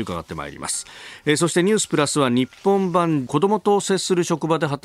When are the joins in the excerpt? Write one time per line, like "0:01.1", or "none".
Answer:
0:03.3